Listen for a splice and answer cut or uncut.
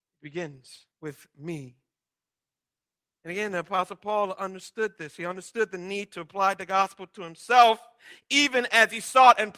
cut